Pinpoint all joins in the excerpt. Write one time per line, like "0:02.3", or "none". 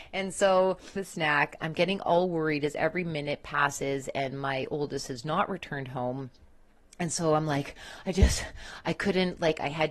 0:01.0